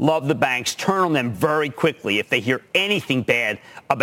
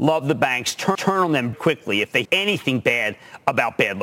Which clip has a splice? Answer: second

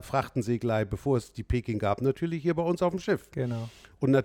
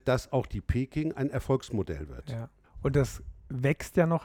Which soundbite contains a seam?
second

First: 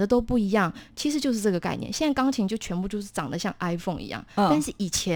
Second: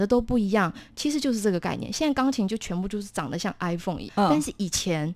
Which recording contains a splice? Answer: second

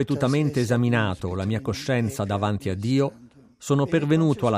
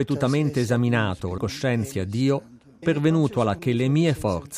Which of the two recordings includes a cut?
second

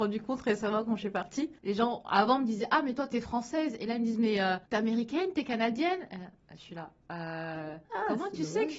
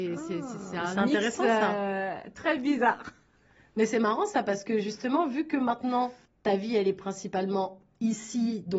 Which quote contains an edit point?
first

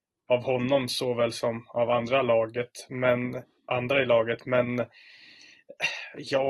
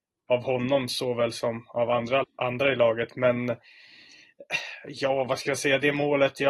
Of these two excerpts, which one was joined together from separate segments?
second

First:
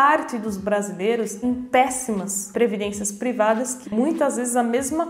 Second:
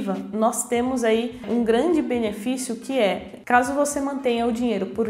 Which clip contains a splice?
first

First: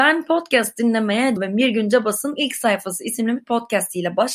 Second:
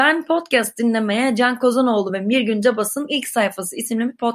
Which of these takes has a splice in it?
first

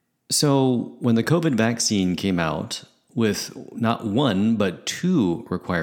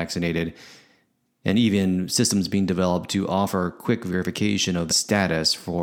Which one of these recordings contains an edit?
second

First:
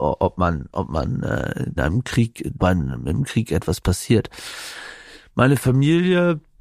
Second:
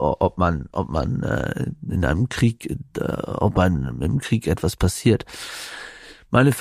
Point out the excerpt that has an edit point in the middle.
first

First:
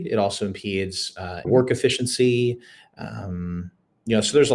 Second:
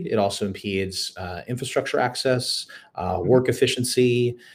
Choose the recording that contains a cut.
first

